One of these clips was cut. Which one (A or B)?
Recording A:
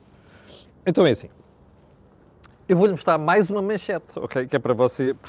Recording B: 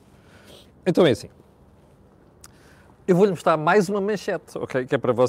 A